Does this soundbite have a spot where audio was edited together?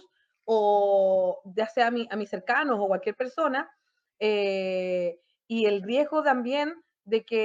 no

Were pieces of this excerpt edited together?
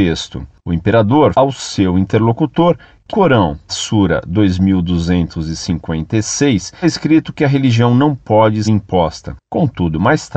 yes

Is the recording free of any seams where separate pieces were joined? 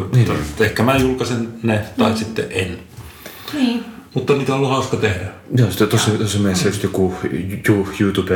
yes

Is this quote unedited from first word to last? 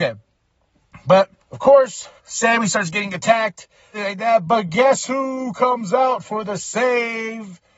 no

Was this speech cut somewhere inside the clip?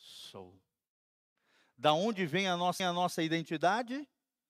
yes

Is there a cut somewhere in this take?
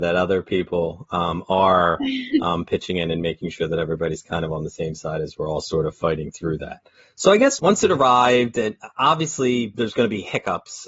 no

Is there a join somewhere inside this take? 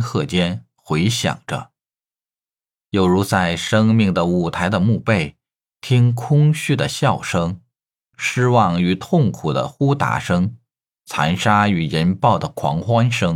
no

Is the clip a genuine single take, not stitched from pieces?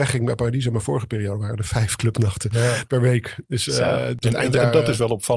no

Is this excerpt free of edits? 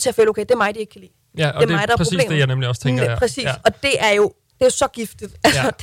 yes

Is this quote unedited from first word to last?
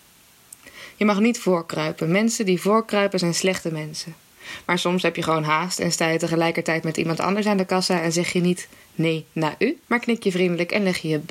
no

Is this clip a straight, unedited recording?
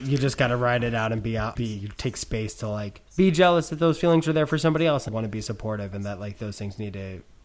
no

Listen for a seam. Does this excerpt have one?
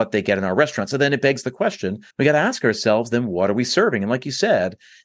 yes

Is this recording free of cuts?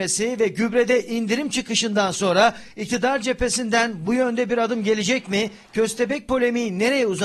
yes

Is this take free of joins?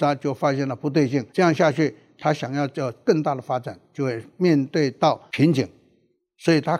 no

